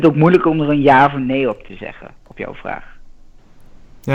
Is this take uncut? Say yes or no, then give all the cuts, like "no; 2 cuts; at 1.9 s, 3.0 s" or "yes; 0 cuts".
yes; 0 cuts